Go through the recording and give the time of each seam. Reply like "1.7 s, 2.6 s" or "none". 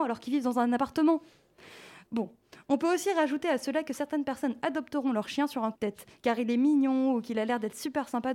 5.7 s